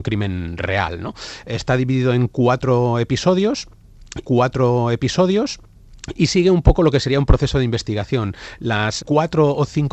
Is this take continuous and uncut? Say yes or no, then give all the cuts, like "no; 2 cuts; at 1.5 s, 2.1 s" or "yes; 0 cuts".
no; 2 cuts; at 4.2 s, 9.0 s